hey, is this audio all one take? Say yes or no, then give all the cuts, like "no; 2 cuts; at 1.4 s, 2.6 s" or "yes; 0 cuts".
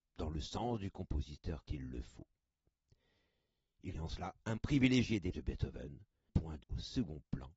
no; 6 cuts; at 1.6 s, 3.9 s, 4.6 s, 5.3 s, 6.3 s, 6.6 s